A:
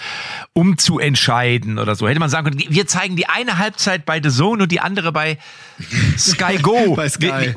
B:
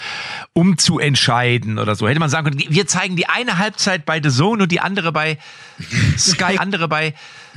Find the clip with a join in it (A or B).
B